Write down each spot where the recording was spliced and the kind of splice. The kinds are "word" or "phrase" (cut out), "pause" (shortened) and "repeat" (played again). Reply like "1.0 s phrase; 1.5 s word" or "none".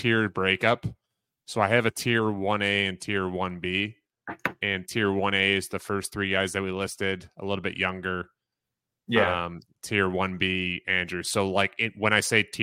none